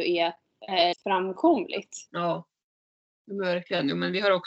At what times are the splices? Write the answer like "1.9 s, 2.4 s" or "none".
0.9 s, 2.1 s